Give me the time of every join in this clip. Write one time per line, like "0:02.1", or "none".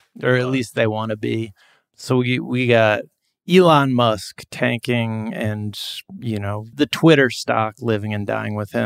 0:06.7